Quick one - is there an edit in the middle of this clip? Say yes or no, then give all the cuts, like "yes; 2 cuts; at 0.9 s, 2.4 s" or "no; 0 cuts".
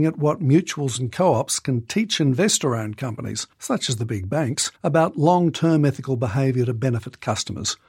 yes; 2 cuts; at 3.5 s, 4.8 s